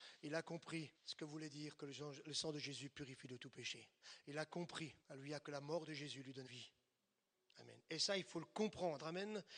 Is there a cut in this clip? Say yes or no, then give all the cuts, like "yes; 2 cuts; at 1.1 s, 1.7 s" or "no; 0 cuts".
yes; 3 cuts; at 0.9 s, 5.0 s, 6.5 s